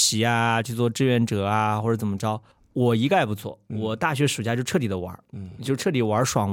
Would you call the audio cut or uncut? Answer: uncut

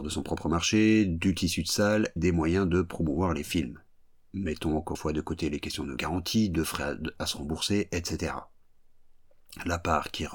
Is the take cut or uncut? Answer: cut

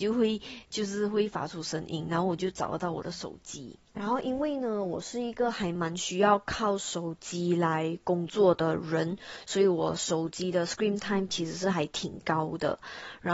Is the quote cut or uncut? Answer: uncut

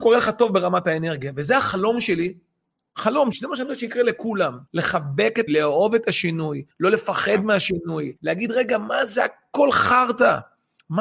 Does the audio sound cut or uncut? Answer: cut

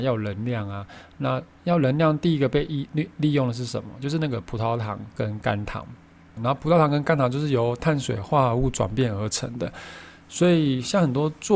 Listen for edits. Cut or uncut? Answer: cut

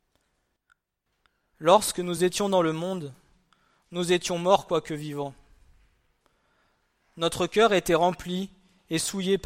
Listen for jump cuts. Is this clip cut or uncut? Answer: uncut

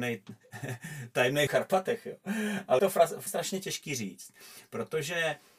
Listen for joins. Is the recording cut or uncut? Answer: cut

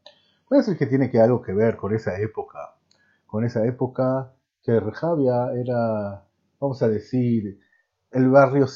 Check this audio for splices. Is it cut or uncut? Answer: uncut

